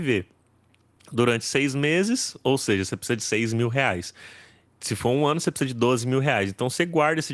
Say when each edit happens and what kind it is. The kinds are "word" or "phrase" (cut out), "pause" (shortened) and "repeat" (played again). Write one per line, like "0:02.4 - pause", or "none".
none